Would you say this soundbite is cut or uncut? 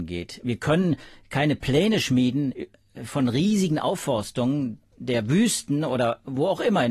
uncut